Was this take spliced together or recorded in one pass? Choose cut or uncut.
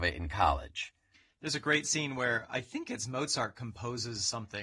uncut